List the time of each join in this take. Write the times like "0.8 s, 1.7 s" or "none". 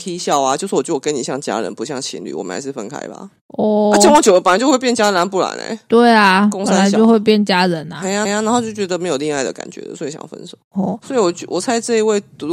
3.4 s, 8.3 s, 10.6 s